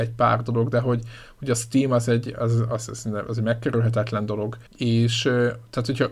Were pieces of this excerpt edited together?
yes; 1 cut; at 4.7 s

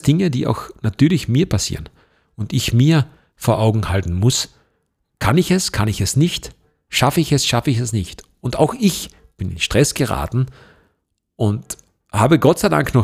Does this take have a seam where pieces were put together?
no; 0 cuts

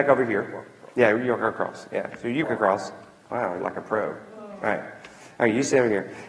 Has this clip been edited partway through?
yes; 2 cuts; at 2.4 s, 3.6 s

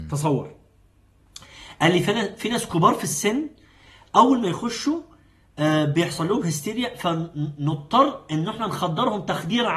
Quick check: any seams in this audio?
no; 0 cuts

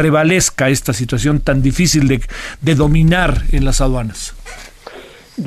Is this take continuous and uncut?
yes; 0 cuts

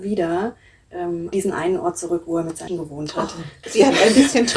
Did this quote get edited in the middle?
yes; 3 cuts; at 1.3 s, 2.7 s, 3.6 s

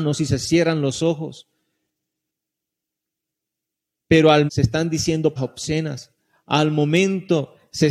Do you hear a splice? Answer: yes; 2 cuts; at 4.5 s, 5.4 s

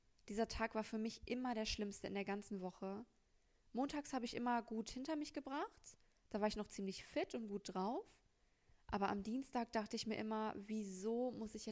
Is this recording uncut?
yes; 0 cuts

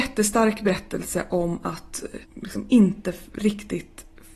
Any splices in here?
yes; 1 cut; at 2.2 s

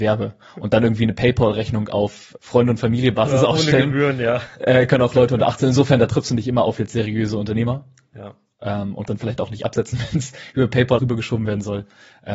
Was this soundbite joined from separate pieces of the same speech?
yes; 3 cuts; at 2.4 s, 9.1 s, 11.0 s

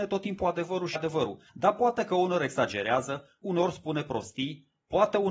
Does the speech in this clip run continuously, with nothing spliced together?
no; 3 cuts; at 1.0 s, 1.5 s, 3.4 s

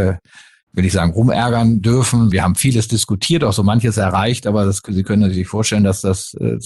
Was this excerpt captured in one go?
no; 1 cut; at 2.3 s

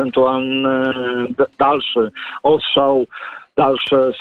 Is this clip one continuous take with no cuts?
yes; 0 cuts

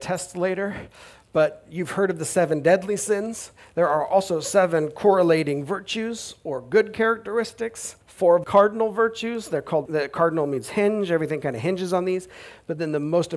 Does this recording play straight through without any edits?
no; 3 cuts; at 8.0 s, 8.4 s, 9.9 s

